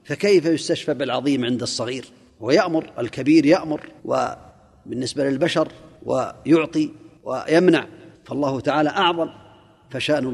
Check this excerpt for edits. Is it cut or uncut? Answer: cut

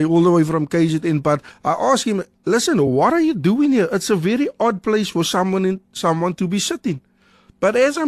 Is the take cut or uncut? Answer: uncut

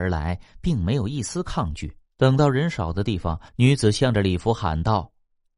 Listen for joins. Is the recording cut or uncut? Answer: cut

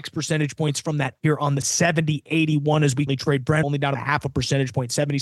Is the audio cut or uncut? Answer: cut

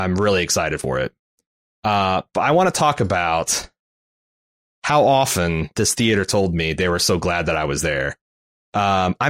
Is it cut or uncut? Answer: uncut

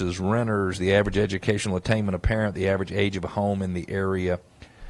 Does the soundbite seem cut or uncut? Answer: uncut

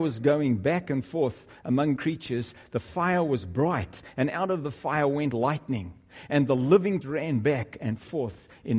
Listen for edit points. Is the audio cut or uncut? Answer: cut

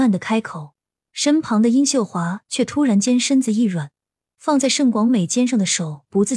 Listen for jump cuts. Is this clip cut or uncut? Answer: uncut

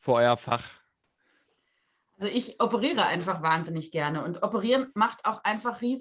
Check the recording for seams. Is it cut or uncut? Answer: uncut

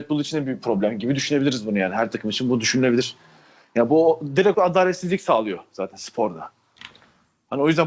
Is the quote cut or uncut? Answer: cut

